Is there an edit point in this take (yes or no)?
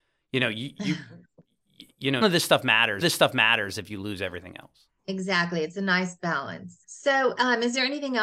yes